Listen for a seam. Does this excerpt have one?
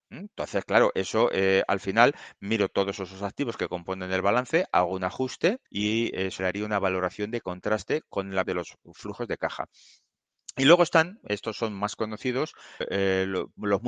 yes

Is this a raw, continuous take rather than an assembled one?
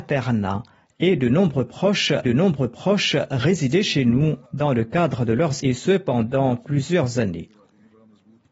no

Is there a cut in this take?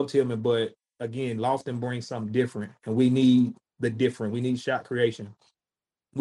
no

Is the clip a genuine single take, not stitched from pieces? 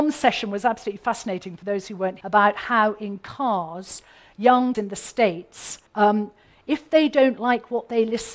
no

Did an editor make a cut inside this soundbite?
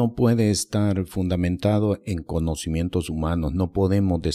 no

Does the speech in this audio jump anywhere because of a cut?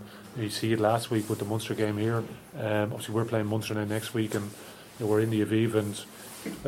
no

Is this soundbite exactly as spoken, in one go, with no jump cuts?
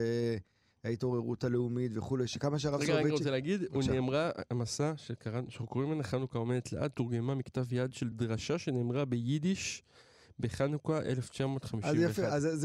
yes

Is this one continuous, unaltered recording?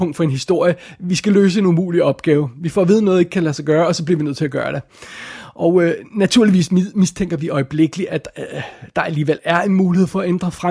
yes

